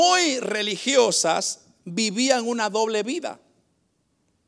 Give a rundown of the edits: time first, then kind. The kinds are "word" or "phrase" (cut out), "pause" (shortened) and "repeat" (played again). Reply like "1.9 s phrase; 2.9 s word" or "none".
none